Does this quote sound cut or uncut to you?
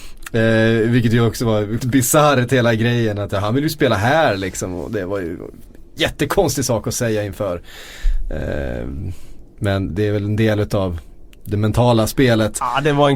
cut